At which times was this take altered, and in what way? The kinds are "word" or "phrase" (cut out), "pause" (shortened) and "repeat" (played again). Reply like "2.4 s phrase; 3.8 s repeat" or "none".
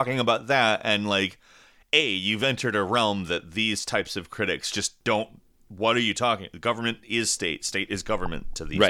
none

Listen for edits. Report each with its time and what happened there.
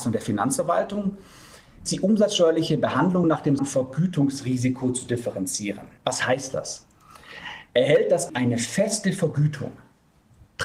1.9 s word; 3.2 s word; 3.6 s word; 6.0 s pause; 8.3 s word

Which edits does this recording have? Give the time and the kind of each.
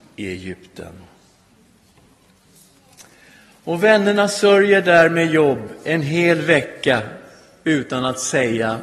none

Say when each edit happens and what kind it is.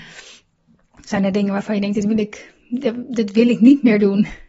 none

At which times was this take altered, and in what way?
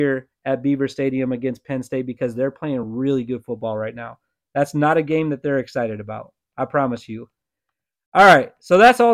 none

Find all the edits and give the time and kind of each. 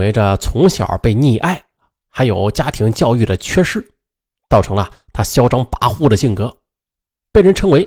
1.8 s pause

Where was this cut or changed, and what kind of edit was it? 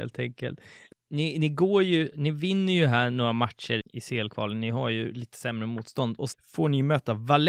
3.8 s word; 6.3 s word

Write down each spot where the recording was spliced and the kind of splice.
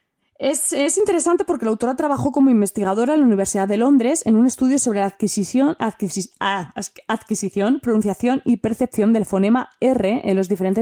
none

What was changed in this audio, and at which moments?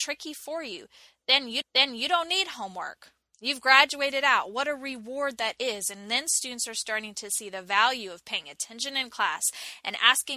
1.6 s repeat

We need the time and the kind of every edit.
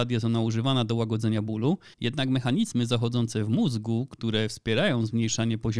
1.9 s pause

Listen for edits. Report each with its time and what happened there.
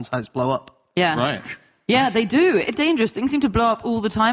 2.7 s word

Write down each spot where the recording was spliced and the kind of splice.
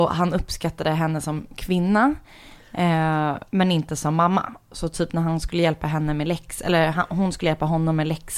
none

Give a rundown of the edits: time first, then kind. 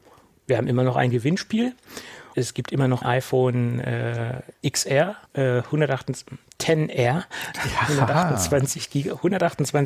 2.3 s word; 3.0 s word; 5.3 s pause

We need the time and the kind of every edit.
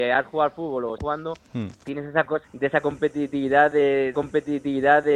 1.0 s word; 2.4 s word; 4.1 s repeat

